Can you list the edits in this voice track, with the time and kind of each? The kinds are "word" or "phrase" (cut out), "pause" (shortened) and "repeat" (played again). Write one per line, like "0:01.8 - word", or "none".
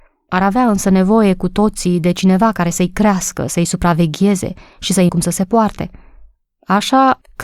0:05.1 - word